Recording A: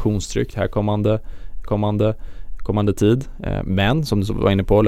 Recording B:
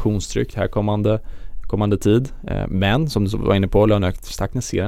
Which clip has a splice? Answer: A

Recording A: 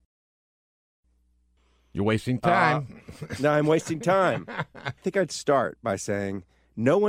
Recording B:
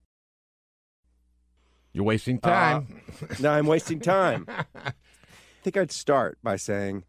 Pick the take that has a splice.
A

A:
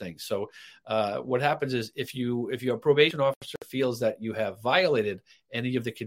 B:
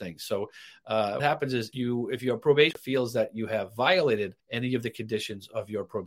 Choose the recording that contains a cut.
B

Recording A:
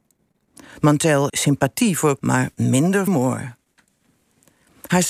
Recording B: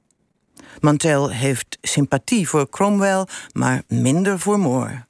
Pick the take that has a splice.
A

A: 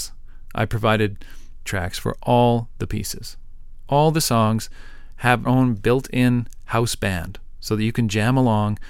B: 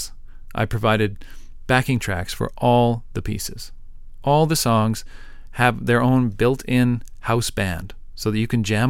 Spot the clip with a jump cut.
A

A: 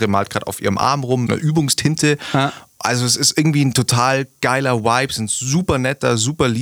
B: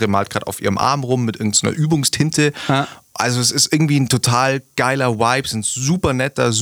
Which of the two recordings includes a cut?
A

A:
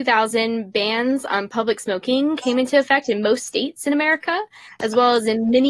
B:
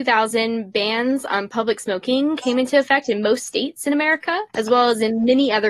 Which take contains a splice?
B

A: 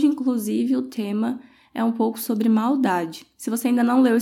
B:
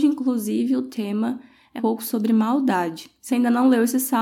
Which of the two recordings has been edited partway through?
B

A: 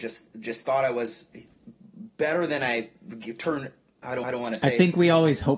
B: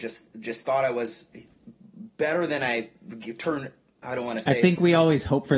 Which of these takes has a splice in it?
A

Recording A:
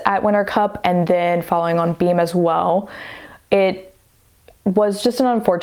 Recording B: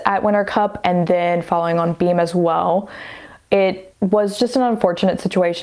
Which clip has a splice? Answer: B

